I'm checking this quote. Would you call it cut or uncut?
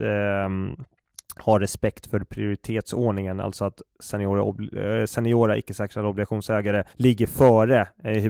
cut